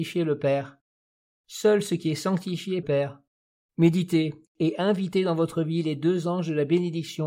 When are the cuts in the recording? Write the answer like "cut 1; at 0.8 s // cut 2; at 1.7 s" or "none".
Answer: cut 1; at 2.8 s // cut 2; at 3.5 s